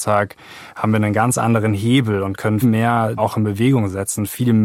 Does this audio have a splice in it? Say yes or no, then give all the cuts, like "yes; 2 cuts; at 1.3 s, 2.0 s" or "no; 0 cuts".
yes; 2 cuts; at 2.6 s, 3.2 s